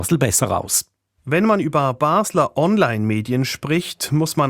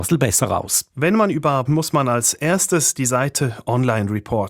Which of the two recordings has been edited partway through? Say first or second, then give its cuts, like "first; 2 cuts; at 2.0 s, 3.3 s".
second; 2 cuts; at 0.9 s, 1.7 s